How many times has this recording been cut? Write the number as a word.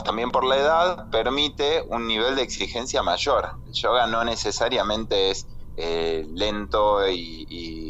zero